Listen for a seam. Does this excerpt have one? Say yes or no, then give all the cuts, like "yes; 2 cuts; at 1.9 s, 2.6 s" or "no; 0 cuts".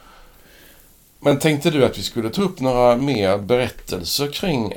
no; 0 cuts